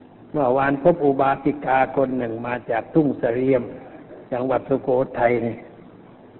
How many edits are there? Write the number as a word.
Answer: one